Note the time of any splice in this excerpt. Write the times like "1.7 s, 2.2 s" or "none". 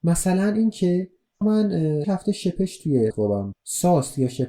1.4 s, 2.0 s, 3.1 s, 3.5 s